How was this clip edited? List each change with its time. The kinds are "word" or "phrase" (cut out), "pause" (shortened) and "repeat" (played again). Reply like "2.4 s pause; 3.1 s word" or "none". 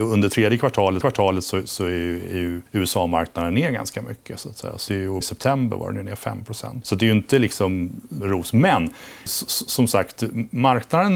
1.0 s repeat; 2.7 s pause; 4.9 s word; 5.2 s phrase; 6.8 s word; 8.2 s phrase; 9.3 s word